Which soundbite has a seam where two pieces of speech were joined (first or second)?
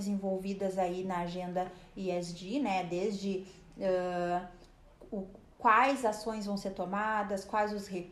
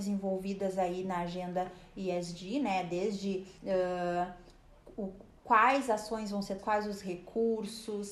second